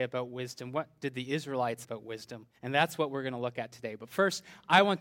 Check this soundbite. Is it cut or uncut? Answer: cut